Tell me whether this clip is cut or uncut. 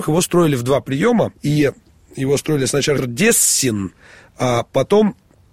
cut